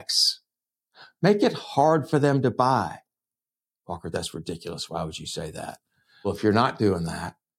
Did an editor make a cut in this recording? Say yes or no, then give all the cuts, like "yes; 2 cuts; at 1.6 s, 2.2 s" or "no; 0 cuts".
no; 0 cuts